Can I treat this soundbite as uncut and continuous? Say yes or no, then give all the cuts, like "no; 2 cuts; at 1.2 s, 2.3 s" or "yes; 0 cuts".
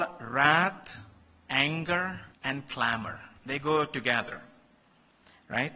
no; 2 cuts; at 2.3 s, 3.4 s